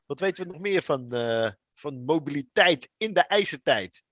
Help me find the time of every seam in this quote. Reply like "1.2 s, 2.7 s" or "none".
none